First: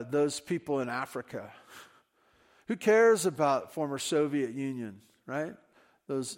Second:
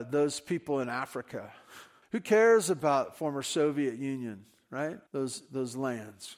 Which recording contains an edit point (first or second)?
second